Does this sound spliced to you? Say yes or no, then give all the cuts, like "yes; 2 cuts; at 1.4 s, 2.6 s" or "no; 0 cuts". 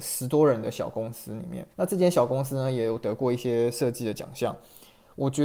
yes; 1 cut; at 1.7 s